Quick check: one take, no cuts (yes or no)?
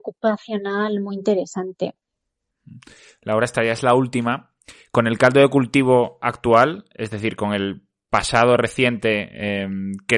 yes